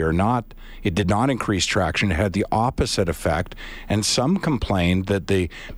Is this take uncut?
yes; 0 cuts

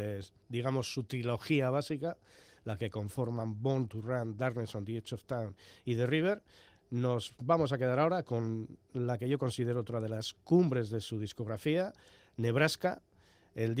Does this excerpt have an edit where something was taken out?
no; 0 cuts

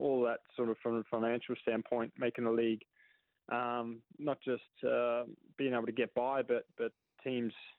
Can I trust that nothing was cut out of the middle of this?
yes; 0 cuts

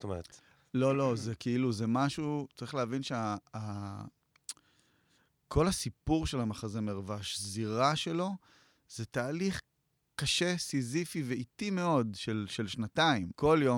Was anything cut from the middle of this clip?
no; 0 cuts

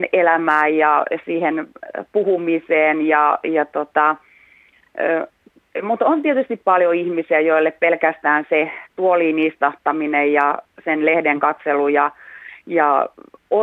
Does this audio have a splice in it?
no; 0 cuts

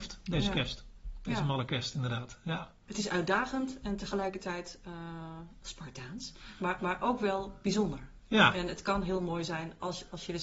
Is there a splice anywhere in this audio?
yes; 2 cuts; at 2.8 s, 6.8 s

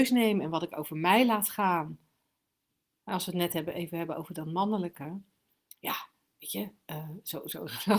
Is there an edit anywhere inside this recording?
no; 0 cuts

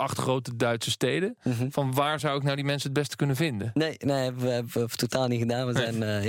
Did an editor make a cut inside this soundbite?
no; 0 cuts

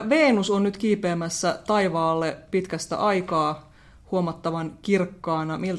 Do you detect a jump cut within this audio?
no; 0 cuts

